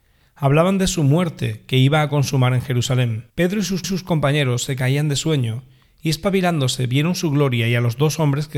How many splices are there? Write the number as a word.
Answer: two